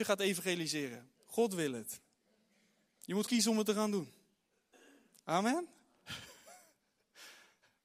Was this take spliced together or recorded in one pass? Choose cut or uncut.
cut